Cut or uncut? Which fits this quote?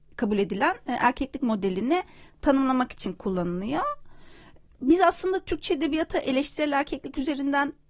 uncut